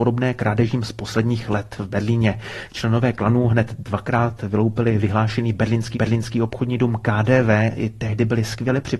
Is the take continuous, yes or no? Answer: no